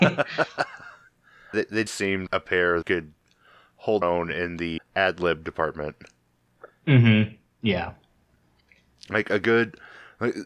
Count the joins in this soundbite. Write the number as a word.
six